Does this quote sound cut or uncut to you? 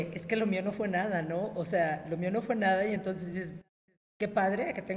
uncut